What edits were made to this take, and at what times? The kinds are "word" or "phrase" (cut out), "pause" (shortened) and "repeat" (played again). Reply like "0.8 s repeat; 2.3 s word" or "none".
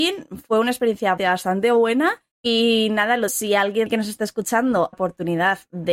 1.2 s word; 2.3 s pause; 3.3 s word; 4.9 s phrase